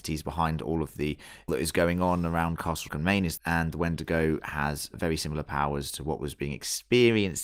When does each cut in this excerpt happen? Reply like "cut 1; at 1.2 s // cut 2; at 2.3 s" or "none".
cut 1; at 1.5 s // cut 2; at 2.9 s // cut 3; at 3.4 s // cut 4; at 4.9 s